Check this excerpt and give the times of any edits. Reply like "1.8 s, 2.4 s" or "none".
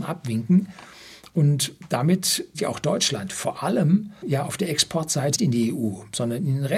2.5 s, 4.2 s, 5.4 s

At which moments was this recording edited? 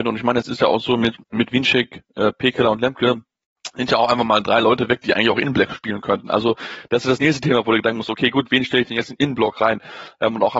1.2 s

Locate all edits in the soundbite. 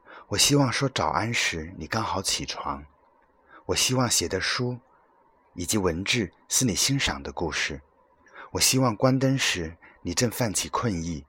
none

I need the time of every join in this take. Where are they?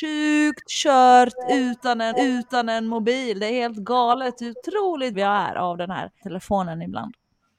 2.1 s, 5.1 s, 6.2 s

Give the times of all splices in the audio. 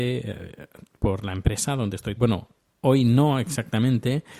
2.2 s

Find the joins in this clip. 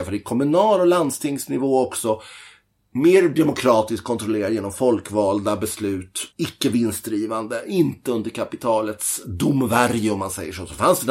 6.3 s

